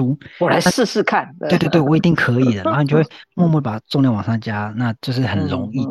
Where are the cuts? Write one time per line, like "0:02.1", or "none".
0:05.0